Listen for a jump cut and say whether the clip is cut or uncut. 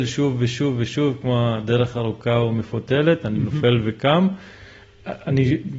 uncut